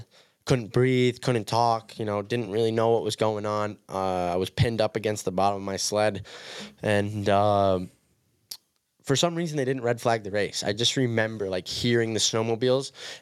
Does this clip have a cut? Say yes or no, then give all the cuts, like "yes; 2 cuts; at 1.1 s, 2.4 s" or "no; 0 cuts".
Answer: no; 0 cuts